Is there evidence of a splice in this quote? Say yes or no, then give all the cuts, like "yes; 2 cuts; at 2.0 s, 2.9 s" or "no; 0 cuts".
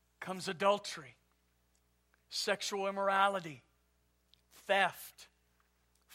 no; 0 cuts